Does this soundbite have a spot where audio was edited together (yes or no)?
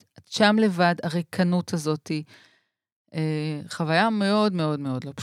no